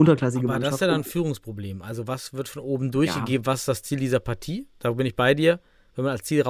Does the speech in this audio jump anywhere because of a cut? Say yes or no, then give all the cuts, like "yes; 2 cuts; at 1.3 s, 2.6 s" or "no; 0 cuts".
no; 0 cuts